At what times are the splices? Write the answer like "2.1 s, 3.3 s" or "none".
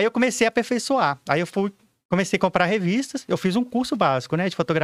none